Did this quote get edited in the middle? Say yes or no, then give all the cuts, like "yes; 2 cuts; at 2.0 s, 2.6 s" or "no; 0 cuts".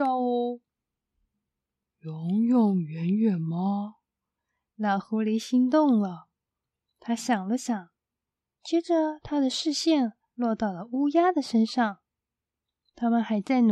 no; 0 cuts